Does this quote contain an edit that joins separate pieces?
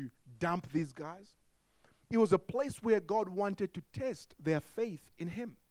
no; 0 cuts

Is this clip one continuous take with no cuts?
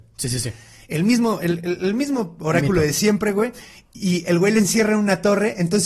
yes; 0 cuts

